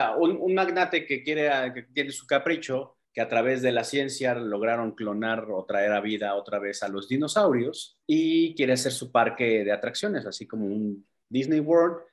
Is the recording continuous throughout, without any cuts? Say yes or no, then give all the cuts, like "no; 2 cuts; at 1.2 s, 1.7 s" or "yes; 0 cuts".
no; 2 cuts; at 3.0 s, 8.0 s